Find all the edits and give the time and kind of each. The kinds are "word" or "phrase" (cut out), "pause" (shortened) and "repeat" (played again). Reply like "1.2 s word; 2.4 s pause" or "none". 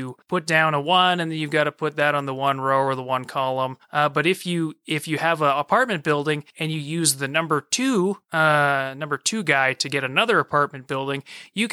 none